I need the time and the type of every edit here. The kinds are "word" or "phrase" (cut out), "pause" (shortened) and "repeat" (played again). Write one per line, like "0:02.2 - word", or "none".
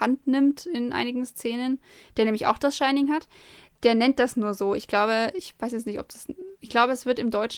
none